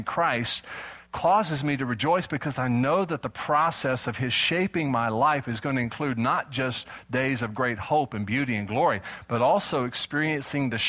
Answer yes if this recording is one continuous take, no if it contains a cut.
no